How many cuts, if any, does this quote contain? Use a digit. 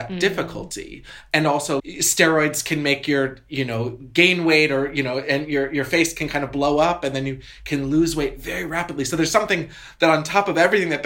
1